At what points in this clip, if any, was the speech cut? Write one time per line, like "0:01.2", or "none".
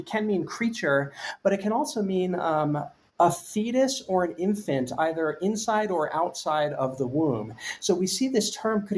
0:03.1